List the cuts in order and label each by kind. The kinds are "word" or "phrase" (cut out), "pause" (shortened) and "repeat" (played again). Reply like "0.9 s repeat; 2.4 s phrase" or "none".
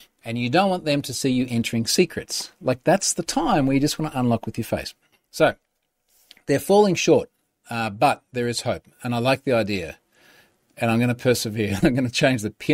none